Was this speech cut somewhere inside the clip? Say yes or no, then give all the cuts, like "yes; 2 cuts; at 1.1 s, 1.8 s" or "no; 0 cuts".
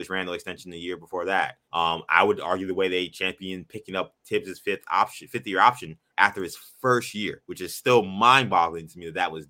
yes; 2 cuts; at 1.6 s, 7.4 s